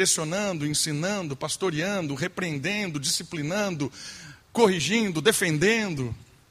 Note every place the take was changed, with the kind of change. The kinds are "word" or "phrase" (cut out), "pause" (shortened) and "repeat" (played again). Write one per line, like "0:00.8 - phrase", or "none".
none